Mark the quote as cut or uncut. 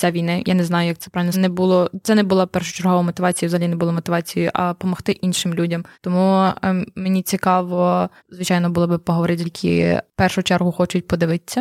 cut